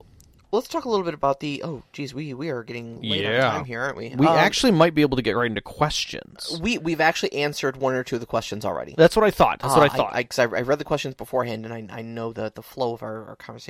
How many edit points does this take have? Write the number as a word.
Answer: zero